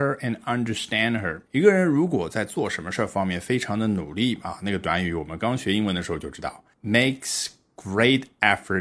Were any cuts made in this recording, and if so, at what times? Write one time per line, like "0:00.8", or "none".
0:01.5
0:06.7